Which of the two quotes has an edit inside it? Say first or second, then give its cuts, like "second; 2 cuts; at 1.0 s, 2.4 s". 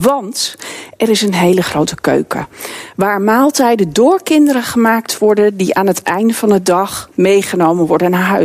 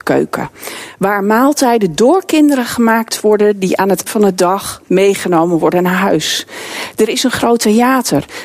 second; 1 cut; at 4.1 s